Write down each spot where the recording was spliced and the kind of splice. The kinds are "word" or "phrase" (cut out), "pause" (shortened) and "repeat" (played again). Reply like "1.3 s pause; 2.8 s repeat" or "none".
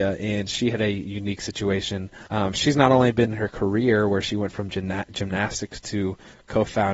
2.3 s pause; 3.3 s word